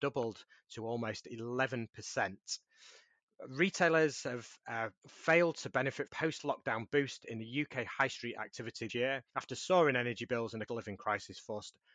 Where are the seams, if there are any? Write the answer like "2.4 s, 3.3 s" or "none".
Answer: 5.0 s, 6.1 s, 8.9 s, 9.3 s, 10.7 s